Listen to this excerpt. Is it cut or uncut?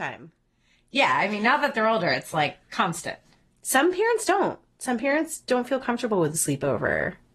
uncut